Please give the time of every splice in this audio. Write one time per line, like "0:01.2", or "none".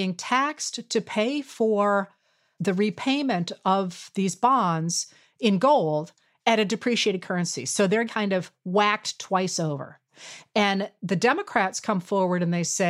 0:08.1